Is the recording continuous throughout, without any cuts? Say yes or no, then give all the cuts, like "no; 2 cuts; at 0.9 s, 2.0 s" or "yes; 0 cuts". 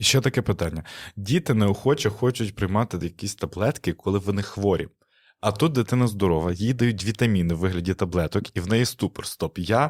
yes; 0 cuts